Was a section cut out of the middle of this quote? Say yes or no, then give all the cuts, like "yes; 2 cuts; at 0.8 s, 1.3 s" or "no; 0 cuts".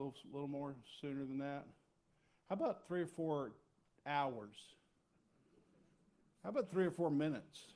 no; 0 cuts